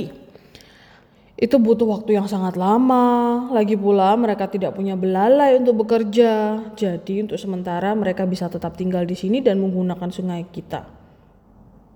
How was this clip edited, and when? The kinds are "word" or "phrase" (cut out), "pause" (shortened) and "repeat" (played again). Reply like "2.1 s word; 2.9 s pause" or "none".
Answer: none

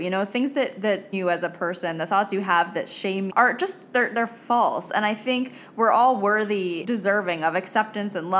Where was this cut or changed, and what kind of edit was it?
1.1 s word; 3.3 s word; 6.8 s word

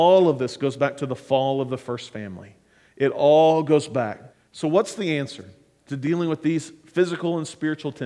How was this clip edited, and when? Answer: 4.3 s pause

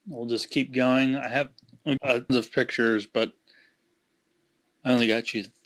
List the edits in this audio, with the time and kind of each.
2.0 s word; 2.3 s word

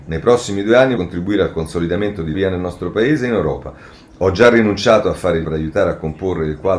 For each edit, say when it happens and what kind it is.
1.0 s word; 2.3 s word; 5.4 s word

